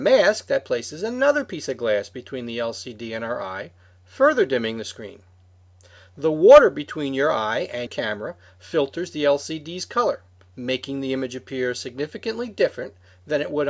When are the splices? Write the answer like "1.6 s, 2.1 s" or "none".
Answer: 7.9 s